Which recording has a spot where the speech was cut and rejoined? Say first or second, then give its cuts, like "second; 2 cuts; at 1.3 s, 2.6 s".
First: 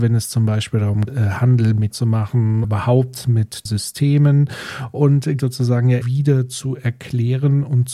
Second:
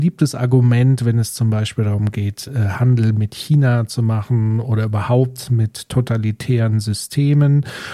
first; 6 cuts; at 1.1 s, 1.9 s, 2.6 s, 3.7 s, 5.4 s, 6.0 s